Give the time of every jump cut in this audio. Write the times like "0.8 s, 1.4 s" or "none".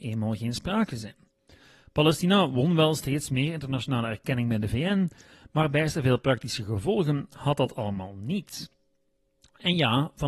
none